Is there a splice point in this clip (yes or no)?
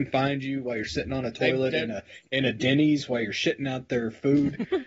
no